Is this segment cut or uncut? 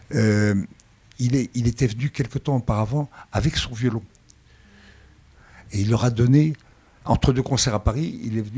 uncut